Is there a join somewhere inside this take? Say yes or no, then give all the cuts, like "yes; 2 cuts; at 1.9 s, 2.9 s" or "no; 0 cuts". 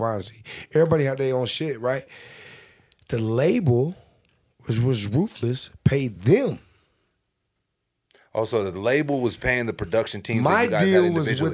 no; 0 cuts